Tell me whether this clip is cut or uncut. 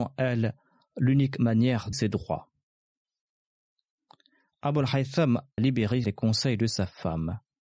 cut